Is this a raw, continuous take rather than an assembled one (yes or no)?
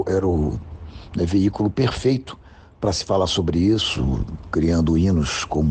yes